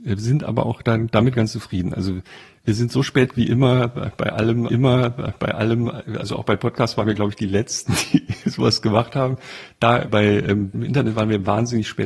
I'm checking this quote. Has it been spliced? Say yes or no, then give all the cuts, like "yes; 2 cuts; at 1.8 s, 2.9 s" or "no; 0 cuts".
yes; 4 cuts; at 3.3 s, 4.7 s, 10.1 s, 10.7 s